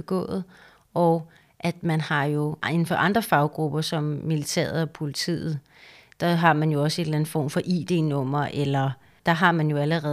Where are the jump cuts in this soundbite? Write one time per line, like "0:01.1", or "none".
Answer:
none